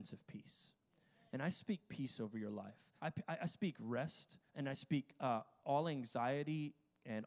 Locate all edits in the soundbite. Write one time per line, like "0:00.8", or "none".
0:03.0
0:04.5